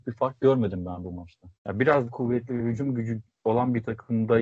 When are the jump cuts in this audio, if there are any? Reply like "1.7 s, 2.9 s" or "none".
1.6 s, 2.1 s